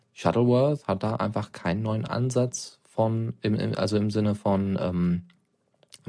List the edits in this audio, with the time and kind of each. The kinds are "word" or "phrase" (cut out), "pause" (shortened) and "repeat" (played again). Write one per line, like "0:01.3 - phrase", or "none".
none